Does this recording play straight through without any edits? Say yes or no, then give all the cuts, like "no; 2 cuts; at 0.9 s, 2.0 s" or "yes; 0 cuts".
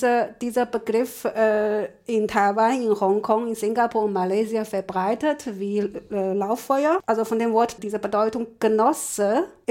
no; 1 cut; at 7.8 s